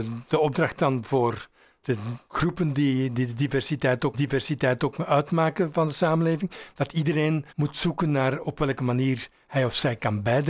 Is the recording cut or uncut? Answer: cut